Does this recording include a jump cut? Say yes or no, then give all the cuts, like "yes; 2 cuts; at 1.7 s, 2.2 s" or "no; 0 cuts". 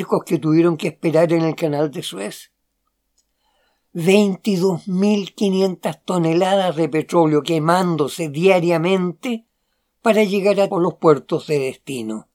yes; 1 cut; at 10.7 s